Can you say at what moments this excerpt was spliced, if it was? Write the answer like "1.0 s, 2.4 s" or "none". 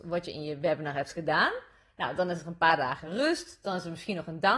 none